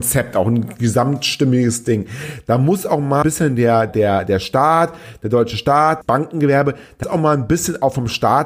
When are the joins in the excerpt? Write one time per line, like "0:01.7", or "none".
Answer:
0:03.2
0:03.9
0:06.0
0:07.0